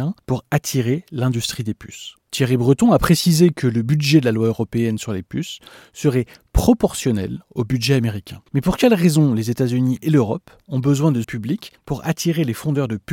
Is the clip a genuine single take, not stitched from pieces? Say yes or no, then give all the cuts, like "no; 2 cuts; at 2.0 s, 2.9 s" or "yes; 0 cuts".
no; 1 cut; at 11.2 s